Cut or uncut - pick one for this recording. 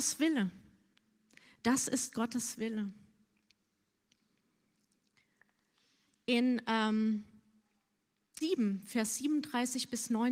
cut